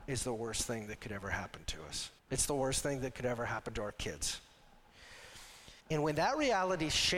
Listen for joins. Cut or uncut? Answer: cut